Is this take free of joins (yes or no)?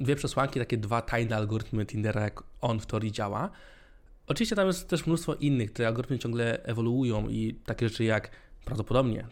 yes